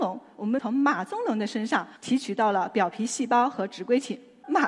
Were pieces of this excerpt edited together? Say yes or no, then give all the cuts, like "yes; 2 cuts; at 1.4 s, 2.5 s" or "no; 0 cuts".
yes; 1 cut; at 2.0 s